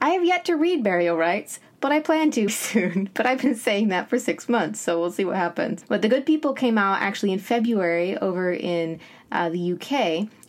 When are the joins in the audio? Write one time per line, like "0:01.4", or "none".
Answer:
0:02.5